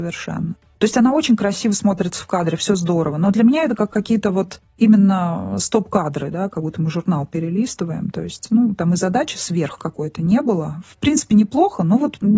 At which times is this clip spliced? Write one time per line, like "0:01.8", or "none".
none